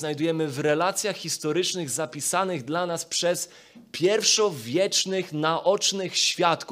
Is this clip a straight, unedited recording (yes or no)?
yes